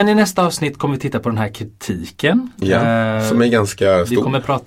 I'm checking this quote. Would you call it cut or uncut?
uncut